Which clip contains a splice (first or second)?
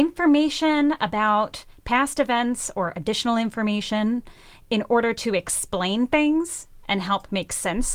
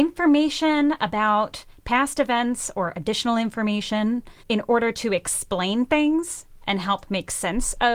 second